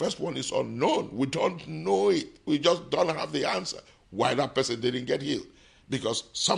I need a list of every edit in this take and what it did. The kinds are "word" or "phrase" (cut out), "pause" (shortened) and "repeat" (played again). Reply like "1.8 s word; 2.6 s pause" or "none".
none